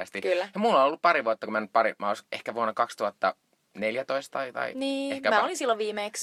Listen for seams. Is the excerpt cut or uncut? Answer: uncut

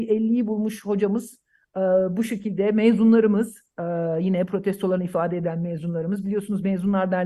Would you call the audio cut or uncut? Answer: uncut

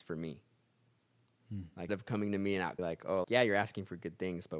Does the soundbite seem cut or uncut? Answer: cut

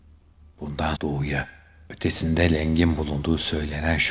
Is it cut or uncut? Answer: cut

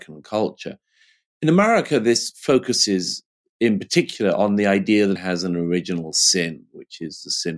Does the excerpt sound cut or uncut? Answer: cut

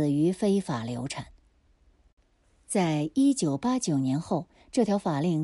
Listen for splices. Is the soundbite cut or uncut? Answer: uncut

